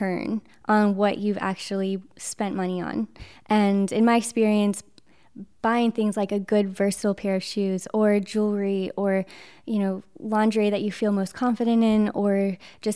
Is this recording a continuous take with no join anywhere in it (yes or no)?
yes